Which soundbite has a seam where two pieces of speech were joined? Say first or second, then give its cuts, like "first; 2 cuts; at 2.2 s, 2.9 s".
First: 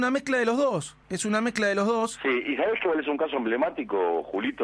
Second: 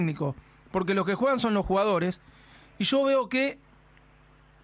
first; 1 cut; at 1.0 s